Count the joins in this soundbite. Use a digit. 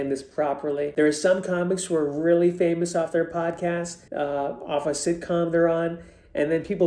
1